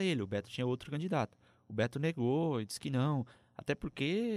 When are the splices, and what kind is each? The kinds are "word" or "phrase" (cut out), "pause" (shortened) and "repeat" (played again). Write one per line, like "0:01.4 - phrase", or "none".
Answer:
none